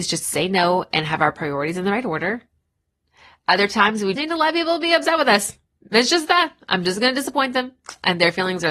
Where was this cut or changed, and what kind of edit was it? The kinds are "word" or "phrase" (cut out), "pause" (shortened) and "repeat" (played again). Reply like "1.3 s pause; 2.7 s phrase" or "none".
4.2 s word; 5.8 s pause